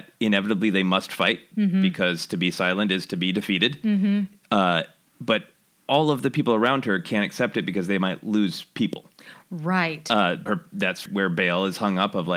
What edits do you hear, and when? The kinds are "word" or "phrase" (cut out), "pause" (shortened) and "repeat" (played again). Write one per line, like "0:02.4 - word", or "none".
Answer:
0:10.5 - word
0:11.1 - word